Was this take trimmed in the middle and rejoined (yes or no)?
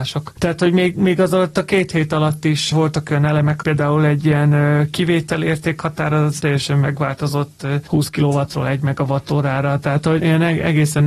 yes